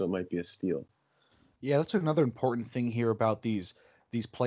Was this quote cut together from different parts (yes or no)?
no